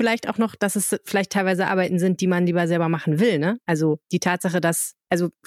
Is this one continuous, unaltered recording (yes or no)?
no